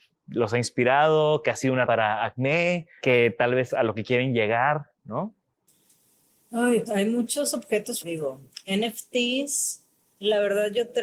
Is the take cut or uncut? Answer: cut